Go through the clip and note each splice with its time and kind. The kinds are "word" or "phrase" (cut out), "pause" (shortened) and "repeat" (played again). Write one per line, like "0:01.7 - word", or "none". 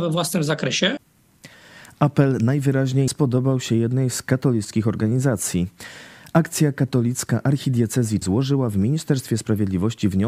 0:03.1 - word
0:08.2 - word

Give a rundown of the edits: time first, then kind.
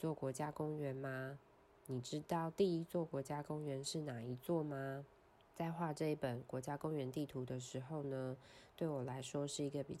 0:01.6 - pause
0:05.3 - pause

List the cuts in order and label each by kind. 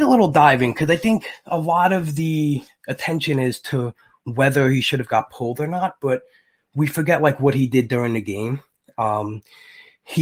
none

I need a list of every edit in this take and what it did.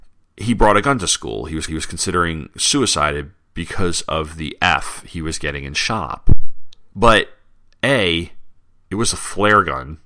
0:01.7 - repeat
0:06.9 - pause
0:08.6 - pause

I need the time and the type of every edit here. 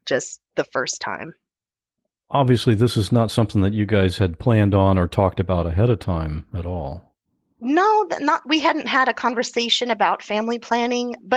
none

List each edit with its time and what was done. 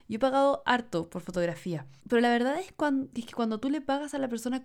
0:02.0 - pause

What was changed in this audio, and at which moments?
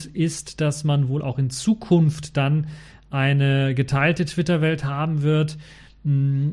none

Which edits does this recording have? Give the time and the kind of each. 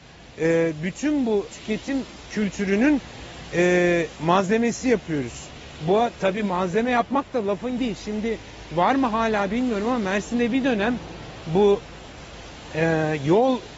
0:01.5 - word
0:07.8 - word

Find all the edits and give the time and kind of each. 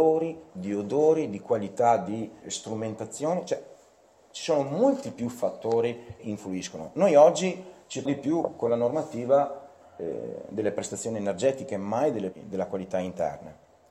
0:02.4 - word
0:06.2 - word
0:08.1 - word
0:12.3 - word

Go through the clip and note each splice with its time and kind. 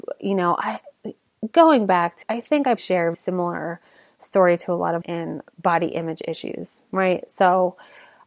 0:02.2 - word
0:02.8 - word
0:03.1 - word
0:05.0 - word

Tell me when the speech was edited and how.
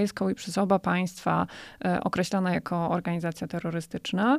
none

